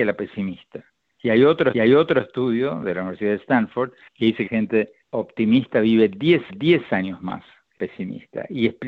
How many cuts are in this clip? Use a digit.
6